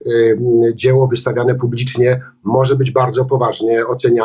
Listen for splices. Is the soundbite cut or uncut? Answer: uncut